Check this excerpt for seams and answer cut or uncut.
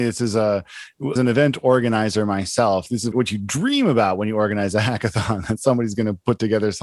cut